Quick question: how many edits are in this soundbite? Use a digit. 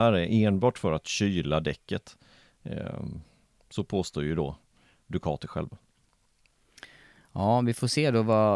0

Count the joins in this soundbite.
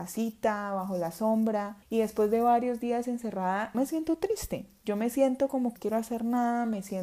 3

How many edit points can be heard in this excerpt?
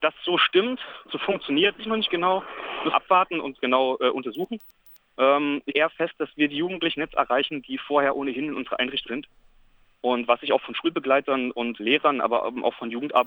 8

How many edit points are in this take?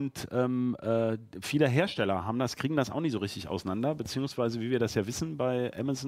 0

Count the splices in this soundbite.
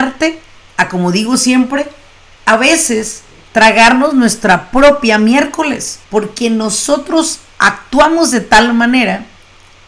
1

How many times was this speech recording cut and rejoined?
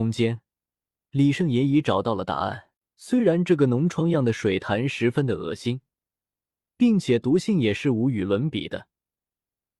1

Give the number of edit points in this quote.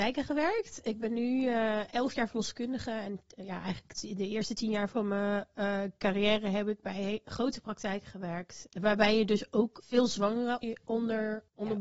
1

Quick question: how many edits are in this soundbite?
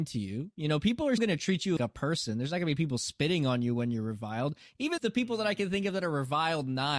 3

